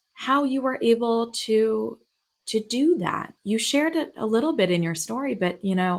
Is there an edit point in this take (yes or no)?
no